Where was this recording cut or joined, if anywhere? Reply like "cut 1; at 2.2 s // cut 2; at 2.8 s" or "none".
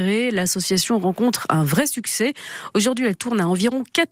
none